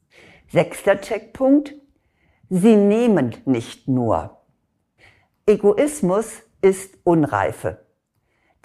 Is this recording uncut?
yes; 0 cuts

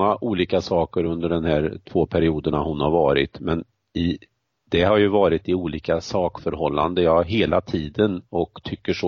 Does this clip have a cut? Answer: no; 0 cuts

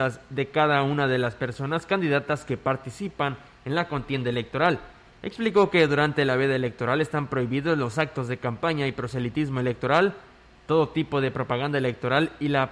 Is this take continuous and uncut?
yes; 0 cuts

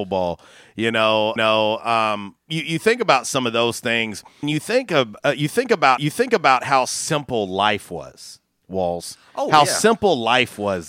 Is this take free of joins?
no; 4 cuts; at 1.4 s, 4.4 s, 6.0 s, 8.4 s

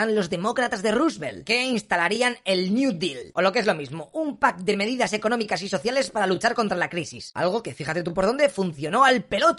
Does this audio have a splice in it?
no; 0 cuts

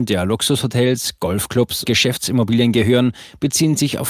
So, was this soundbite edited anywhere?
yes; 1 cut; at 1.8 s

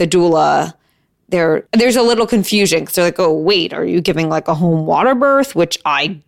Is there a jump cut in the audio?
yes; 1 cut; at 1.7 s

